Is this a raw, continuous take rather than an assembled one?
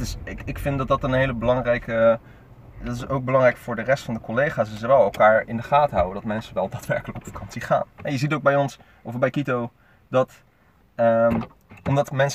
yes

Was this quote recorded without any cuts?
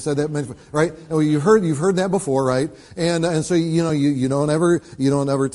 yes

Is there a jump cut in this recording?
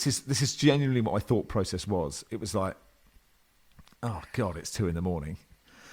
no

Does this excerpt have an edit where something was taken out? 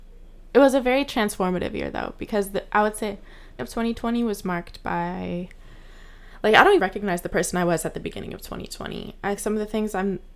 yes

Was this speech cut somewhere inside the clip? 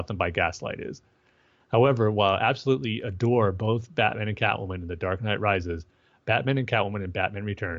no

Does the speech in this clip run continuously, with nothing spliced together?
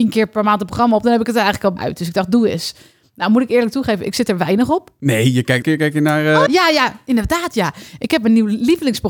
no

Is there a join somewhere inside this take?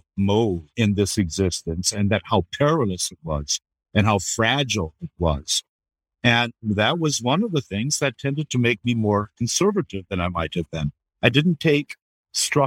no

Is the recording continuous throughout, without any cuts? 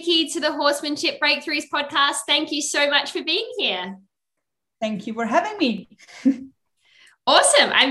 yes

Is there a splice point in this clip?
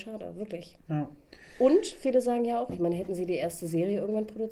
no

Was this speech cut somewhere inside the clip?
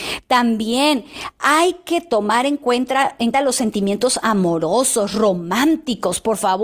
yes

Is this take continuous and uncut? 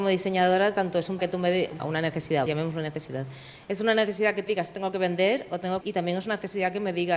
no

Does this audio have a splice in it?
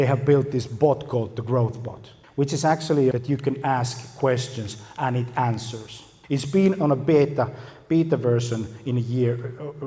yes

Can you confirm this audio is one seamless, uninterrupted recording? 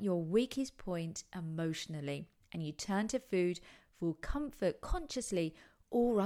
yes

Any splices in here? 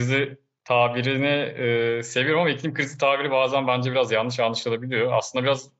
no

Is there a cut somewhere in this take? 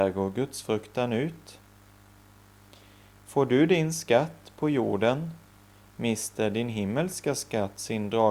no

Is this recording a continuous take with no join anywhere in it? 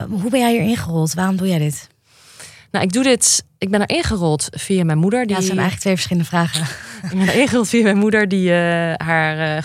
yes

